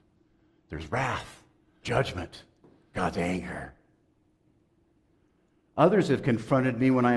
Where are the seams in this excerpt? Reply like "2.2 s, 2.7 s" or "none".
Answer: 1.8 s, 2.9 s